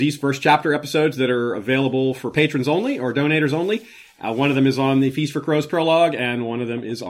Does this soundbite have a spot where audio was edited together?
no; 0 cuts

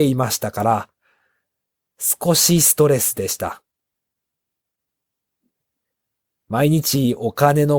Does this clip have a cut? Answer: no; 0 cuts

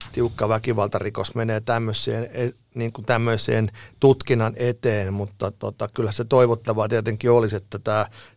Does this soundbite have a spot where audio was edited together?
no; 0 cuts

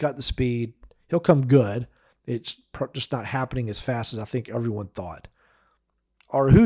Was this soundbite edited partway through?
no; 0 cuts

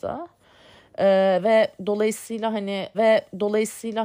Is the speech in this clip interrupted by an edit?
yes; 1 cut; at 2.9 s

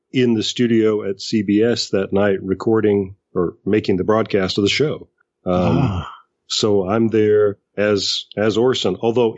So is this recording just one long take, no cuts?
yes; 0 cuts

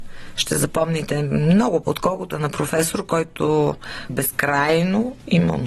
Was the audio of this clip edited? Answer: yes; 3 cuts; at 1.8 s, 2.3 s, 4.1 s

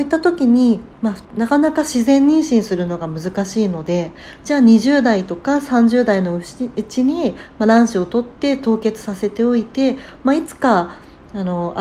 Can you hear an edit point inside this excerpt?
yes; 2 cuts; at 0.9 s, 1.2 s

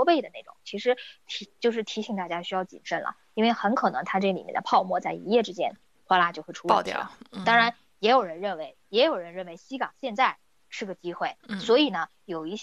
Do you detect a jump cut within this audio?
no; 0 cuts

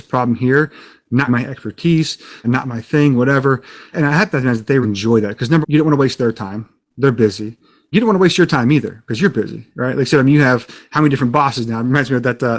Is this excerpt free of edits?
no; 6 cuts; at 1.3 s, 2.4 s, 3.9 s, 4.8 s, 5.6 s, 7.9 s

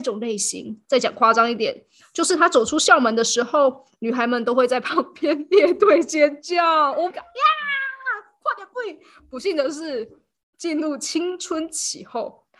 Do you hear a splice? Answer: yes; 1 cut; at 7.1 s

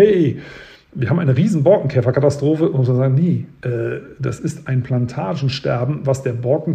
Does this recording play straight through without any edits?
yes; 0 cuts

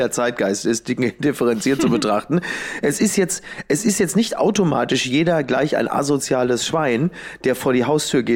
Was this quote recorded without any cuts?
yes; 0 cuts

